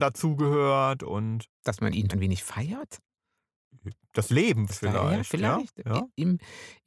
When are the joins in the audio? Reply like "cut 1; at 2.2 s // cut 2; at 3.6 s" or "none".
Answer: cut 1; at 1.5 s // cut 2; at 2.1 s // cut 3; at 4.7 s

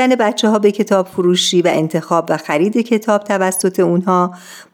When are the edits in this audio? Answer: none

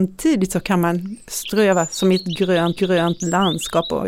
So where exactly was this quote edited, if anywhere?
cut 1; at 2.8 s

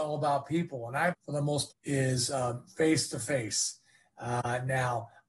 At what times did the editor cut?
cut 1; at 1.1 s // cut 2; at 1.7 s

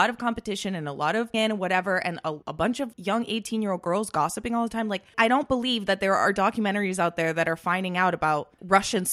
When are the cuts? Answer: cut 1; at 1.3 s // cut 2; at 2.4 s // cut 3; at 2.9 s // cut 4; at 5.1 s

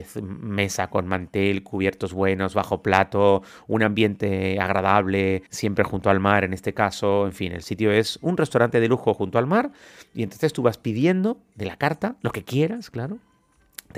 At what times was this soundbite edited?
cut 1; at 5.5 s

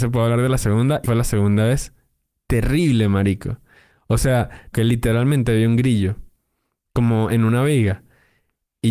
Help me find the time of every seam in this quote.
cut 1; at 1.0 s // cut 2; at 4.7 s

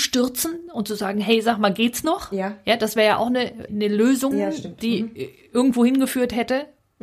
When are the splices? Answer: cut 1; at 3.7 s // cut 2; at 4.3 s

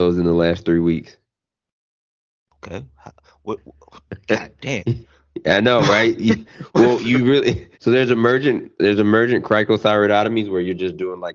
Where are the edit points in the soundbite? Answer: cut 1; at 7.7 s

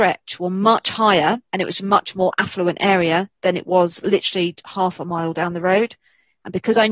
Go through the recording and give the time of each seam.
cut 1; at 1.5 s

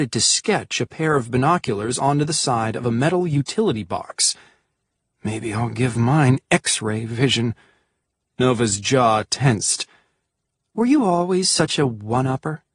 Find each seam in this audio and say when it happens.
none

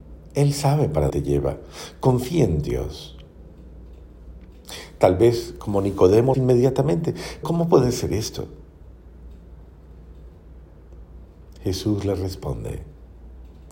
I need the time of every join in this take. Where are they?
cut 1; at 1.1 s // cut 2; at 6.3 s // cut 3; at 7.4 s

